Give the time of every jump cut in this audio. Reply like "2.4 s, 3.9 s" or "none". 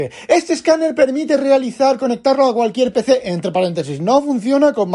none